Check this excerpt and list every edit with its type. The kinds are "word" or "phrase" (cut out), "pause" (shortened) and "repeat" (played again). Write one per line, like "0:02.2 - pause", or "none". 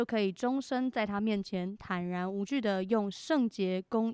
none